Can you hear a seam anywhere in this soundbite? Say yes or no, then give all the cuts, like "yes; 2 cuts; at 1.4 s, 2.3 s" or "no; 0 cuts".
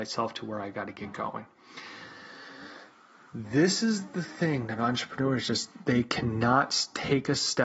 no; 0 cuts